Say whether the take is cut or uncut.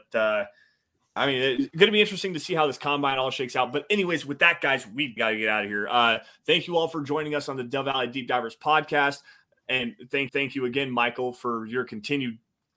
cut